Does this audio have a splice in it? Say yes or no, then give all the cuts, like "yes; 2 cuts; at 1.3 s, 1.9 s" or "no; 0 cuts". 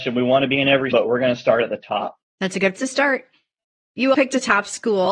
yes; 4 cuts; at 0.9 s, 2.2 s, 2.8 s, 4.1 s